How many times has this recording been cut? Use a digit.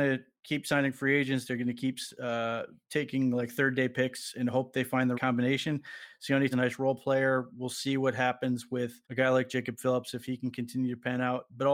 3